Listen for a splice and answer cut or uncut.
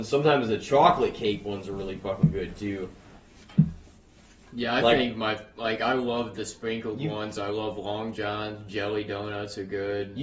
uncut